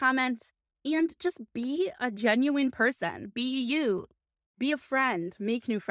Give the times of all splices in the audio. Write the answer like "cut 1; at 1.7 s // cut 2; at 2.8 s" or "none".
none